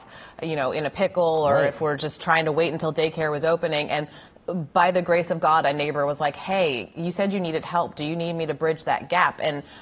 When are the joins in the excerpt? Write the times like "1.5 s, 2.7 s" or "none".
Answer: none